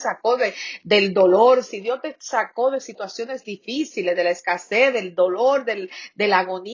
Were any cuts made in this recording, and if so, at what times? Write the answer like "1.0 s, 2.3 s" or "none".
none